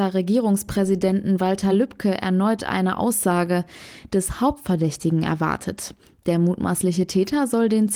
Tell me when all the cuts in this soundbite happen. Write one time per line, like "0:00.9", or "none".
none